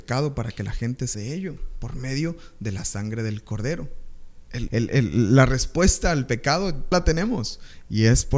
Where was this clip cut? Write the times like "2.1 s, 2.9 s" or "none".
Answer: 1.1 s, 4.7 s, 6.9 s